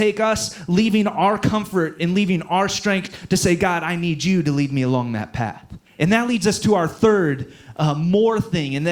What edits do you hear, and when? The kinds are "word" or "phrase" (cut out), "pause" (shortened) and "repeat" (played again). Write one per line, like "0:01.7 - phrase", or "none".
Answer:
0:05.9 - pause